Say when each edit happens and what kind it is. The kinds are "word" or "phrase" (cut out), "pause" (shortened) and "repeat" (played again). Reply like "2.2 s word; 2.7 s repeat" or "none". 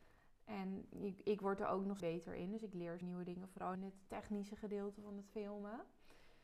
2.0 s phrase; 3.0 s phrase; 3.7 s phrase